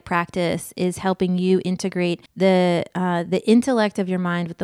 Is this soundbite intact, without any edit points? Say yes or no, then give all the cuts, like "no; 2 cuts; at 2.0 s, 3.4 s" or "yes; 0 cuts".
no; 1 cut; at 2.3 s